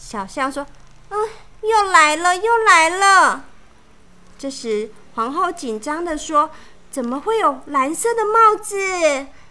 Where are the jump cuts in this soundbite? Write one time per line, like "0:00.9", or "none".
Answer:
0:03.7